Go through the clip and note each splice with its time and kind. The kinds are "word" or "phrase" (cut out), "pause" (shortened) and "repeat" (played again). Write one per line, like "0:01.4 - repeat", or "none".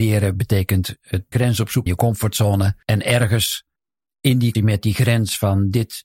0:01.3 - word
0:01.9 - word
0:02.8 - pause
0:03.8 - pause
0:04.5 - word